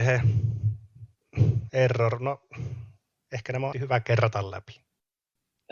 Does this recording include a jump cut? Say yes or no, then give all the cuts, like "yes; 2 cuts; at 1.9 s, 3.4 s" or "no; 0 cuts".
yes; 1 cut; at 3.7 s